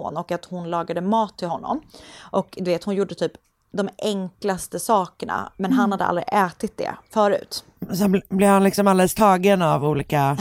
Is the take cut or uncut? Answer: uncut